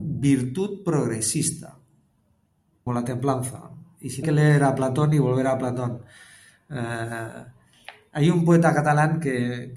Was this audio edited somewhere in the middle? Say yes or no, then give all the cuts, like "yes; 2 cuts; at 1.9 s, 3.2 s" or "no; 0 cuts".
yes; 2 cuts; at 2.9 s, 4.2 s